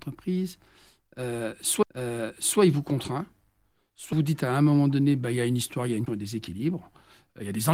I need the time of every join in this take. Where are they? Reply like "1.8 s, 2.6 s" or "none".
1.8 s, 4.1 s, 6.1 s